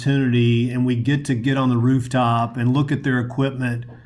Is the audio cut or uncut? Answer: uncut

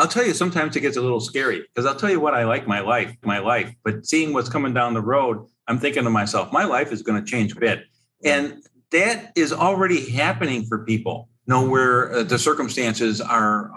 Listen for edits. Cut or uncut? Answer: cut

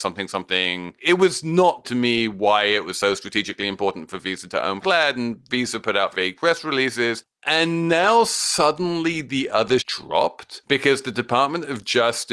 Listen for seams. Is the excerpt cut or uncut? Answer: cut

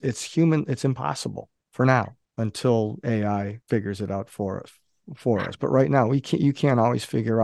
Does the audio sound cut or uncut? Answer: cut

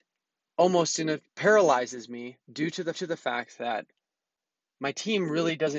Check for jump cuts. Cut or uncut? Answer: cut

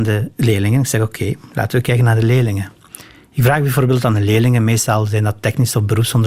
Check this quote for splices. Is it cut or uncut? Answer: uncut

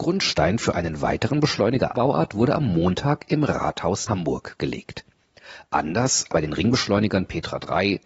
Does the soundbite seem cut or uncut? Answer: cut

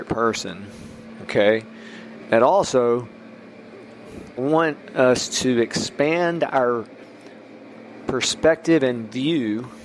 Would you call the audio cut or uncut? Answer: cut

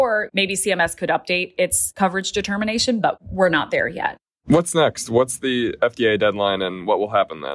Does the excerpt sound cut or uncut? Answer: uncut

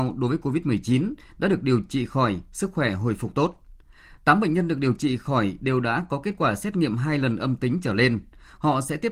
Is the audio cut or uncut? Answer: uncut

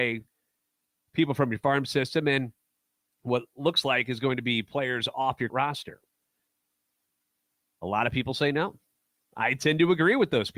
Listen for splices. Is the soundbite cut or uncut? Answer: cut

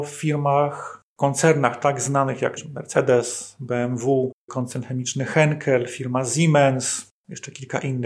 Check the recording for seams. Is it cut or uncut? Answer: cut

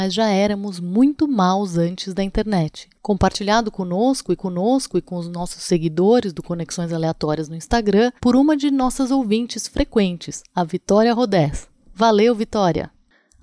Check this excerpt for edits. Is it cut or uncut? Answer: cut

